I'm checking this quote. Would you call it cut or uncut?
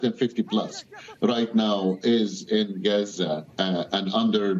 uncut